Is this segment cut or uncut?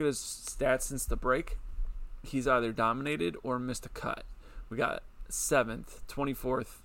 uncut